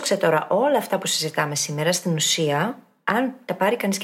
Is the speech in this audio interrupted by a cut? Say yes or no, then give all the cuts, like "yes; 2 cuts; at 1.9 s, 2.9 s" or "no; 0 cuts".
no; 0 cuts